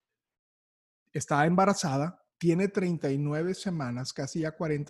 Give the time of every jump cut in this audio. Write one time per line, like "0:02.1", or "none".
0:02.3